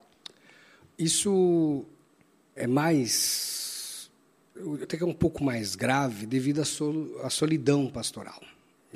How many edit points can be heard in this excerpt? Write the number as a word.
two